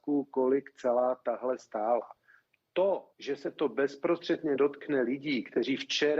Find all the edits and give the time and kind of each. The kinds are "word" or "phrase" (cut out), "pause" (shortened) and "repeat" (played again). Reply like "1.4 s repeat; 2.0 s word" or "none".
1.6 s word; 3.1 s pause